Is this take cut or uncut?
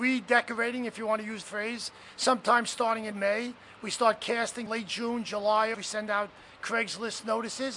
cut